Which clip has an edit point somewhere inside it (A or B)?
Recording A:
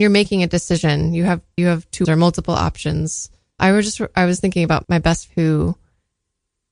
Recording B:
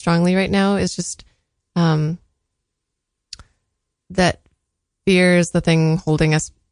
A